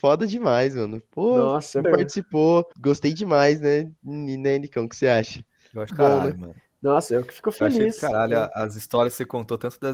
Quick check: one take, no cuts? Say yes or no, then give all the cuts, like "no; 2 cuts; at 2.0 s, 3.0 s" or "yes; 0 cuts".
no; 3 cuts; at 1.8 s, 2.7 s, 5.9 s